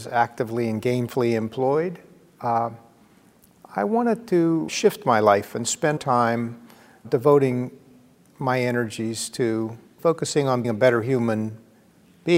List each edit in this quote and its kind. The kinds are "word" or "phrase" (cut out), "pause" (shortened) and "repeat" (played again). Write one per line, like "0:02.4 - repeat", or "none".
0:04.7 - word
0:06.0 - word
0:07.0 - word
0:10.0 - word
0:10.6 - word